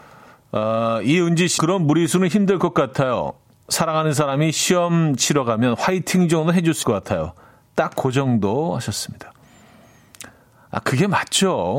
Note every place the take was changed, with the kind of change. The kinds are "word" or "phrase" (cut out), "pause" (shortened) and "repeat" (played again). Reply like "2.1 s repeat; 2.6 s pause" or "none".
1.6 s word; 6.8 s word